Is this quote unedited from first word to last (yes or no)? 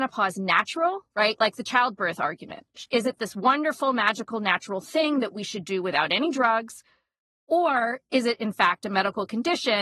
yes